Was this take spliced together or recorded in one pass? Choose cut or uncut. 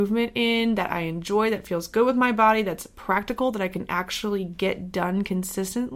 uncut